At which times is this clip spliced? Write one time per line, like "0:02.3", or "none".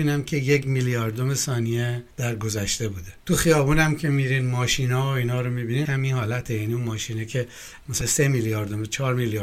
0:02.1
0:03.2
0:05.8
0:08.0